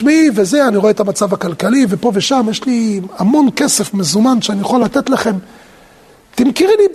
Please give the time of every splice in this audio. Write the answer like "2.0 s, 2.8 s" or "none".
none